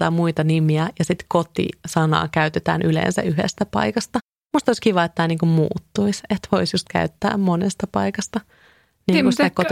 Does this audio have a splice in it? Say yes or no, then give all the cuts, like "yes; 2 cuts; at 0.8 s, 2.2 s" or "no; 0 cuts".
no; 0 cuts